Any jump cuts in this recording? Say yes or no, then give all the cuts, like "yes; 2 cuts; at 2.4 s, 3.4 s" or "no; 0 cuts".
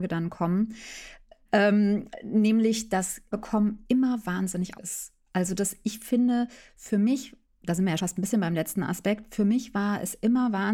yes; 4 cuts; at 3.3 s, 4.7 s, 7.4 s, 8.0 s